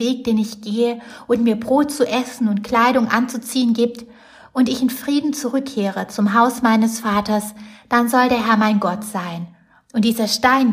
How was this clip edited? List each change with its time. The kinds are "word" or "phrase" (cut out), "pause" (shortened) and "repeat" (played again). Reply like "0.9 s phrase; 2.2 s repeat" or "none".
none